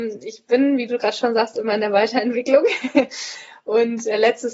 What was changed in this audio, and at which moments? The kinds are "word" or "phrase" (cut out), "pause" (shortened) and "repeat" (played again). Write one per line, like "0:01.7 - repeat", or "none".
none